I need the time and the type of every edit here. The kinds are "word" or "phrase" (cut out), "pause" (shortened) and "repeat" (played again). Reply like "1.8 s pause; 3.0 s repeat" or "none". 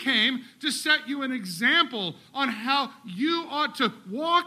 none